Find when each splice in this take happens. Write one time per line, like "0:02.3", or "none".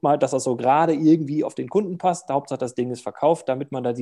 none